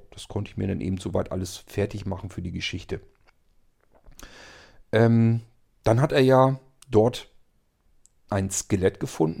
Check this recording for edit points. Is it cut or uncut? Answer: uncut